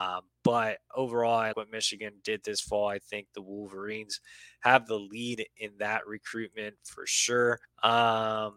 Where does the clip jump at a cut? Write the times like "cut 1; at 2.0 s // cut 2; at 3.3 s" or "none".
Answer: cut 1; at 1.5 s // cut 2; at 7.6 s

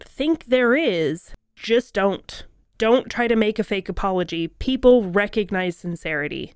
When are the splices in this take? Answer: none

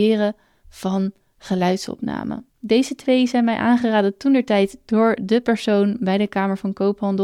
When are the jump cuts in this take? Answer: cut 1; at 2.5 s

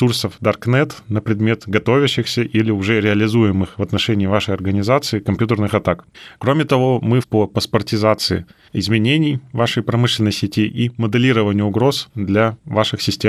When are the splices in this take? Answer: cut 1; at 7.2 s

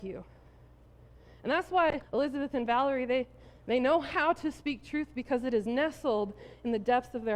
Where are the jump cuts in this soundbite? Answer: cut 1; at 2.0 s

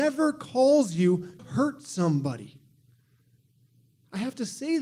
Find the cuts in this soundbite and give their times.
cut 1; at 1.4 s

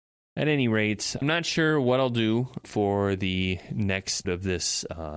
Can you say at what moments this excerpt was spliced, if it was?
cut 1; at 1.2 s // cut 2; at 2.6 s // cut 3; at 4.2 s

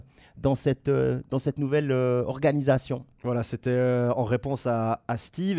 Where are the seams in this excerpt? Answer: none

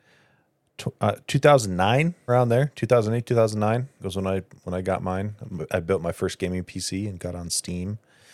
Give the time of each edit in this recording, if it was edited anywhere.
cut 1; at 2.3 s // cut 2; at 4.0 s

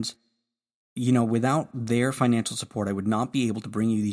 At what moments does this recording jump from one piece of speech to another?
none

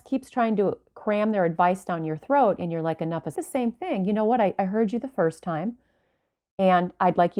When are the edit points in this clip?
cut 1; at 3.4 s

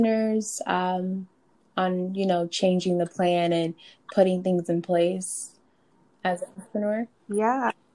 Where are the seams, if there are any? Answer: none

